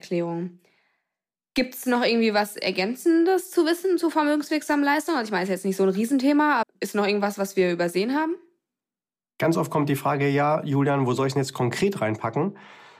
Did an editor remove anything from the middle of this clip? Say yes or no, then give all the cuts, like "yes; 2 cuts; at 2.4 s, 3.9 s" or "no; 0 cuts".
yes; 1 cut; at 6.6 s